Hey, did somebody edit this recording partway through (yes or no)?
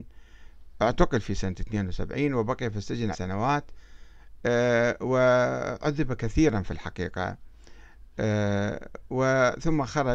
yes